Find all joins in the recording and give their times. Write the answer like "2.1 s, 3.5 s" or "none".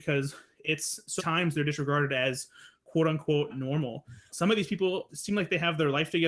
1.2 s, 3.5 s, 4.3 s, 5.1 s